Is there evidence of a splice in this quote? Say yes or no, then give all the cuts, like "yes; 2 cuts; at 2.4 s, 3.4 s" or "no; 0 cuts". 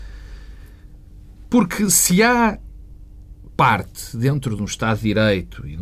no; 0 cuts